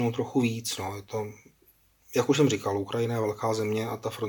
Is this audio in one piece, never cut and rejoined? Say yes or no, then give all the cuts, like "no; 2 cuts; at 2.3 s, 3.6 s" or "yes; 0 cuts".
yes; 0 cuts